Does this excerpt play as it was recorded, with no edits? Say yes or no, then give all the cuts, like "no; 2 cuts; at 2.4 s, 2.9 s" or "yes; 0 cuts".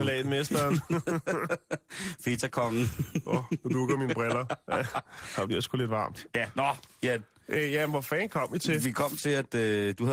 yes; 0 cuts